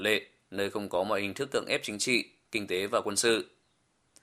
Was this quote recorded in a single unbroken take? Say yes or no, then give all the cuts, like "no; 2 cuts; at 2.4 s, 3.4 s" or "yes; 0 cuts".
yes; 0 cuts